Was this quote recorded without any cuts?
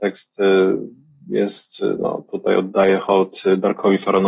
yes; 0 cuts

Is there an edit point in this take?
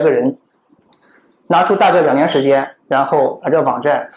yes; 1 cut; at 2.8 s

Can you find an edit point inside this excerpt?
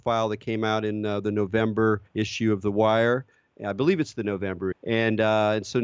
yes; 2 cuts; at 2.1 s, 4.7 s

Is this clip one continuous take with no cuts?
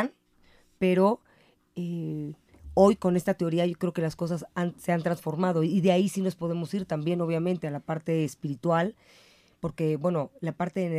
yes; 0 cuts

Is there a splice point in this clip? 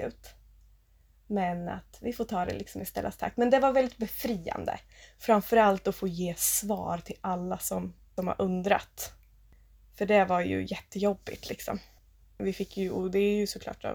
no; 0 cuts

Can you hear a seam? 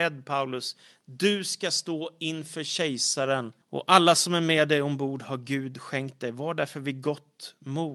yes; 1 cut; at 3.6 s

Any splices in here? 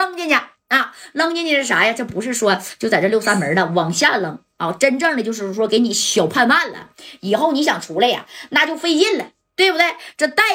no; 0 cuts

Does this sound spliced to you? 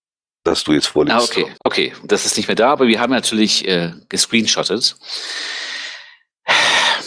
yes; 1 cut; at 1.6 s

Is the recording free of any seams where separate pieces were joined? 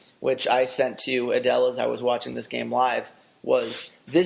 yes; 0 cuts

